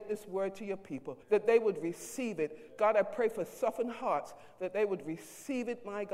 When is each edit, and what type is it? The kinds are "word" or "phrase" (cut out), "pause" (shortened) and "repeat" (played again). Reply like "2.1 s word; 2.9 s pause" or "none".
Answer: 1.2 s pause